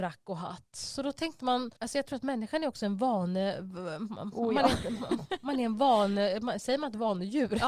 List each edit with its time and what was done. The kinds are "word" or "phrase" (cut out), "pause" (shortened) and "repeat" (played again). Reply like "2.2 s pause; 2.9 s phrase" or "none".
1.8 s pause